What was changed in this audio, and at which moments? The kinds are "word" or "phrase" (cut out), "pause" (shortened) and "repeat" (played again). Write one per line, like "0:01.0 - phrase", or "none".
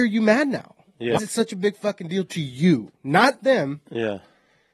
0:01.2 - word
0:03.4 - word

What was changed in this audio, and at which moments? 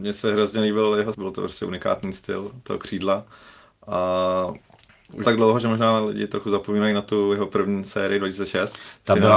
0:01.1 - word
0:05.2 - word

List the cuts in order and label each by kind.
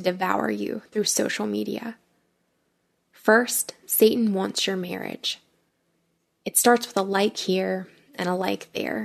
none

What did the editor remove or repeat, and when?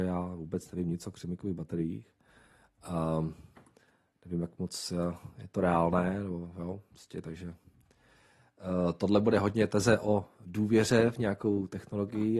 none

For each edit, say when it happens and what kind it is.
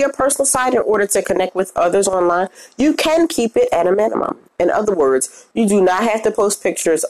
none

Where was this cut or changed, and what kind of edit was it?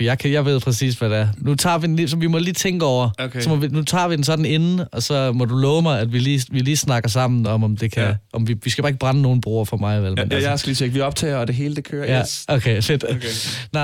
none

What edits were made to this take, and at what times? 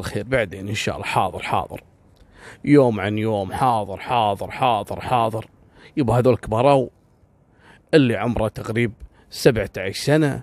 none

